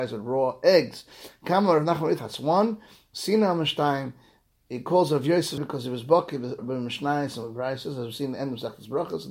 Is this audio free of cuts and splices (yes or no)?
no